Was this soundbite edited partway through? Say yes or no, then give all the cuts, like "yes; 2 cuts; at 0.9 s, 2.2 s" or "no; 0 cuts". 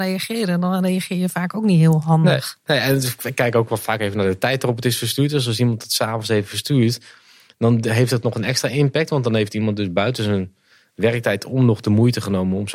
no; 0 cuts